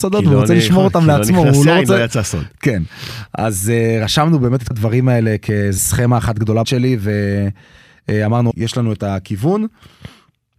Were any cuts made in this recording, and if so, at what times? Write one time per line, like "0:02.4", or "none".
0:04.7
0:05.8
0:06.6
0:08.5